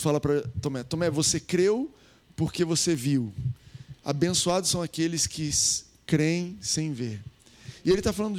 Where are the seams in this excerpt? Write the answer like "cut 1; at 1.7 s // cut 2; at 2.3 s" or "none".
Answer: none